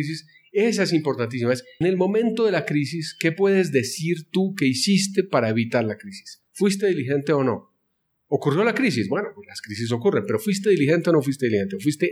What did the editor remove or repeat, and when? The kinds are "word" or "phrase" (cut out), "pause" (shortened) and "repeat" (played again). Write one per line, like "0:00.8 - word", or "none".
0:01.8 - word
0:06.5 - pause